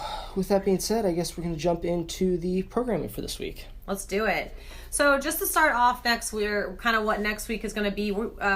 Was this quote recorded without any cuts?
yes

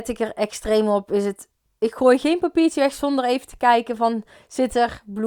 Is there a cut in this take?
no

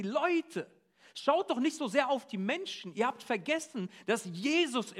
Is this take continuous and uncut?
yes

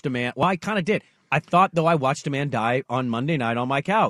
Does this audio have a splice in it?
no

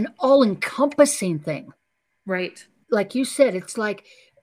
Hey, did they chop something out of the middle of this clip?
yes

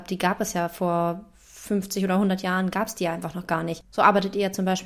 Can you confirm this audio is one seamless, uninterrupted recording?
yes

